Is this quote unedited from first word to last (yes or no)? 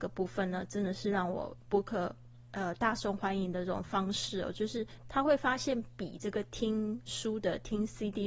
yes